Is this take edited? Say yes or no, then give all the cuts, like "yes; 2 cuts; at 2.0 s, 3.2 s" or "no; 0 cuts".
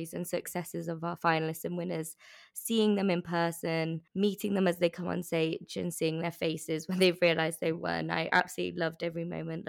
yes; 1 cut; at 4.1 s